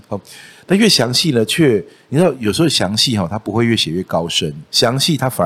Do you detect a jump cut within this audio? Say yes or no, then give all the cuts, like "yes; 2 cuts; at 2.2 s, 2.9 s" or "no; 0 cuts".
no; 0 cuts